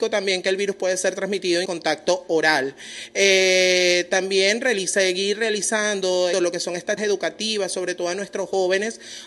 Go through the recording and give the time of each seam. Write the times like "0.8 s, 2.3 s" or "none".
1.7 s, 6.3 s, 7.0 s